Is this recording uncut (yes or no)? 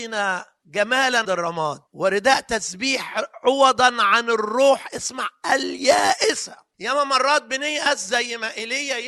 no